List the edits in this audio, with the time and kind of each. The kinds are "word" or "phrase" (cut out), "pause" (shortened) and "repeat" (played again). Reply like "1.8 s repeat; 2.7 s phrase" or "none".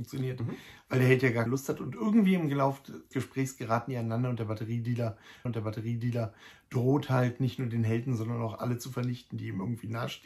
1.5 s word; 3.1 s word; 5.5 s repeat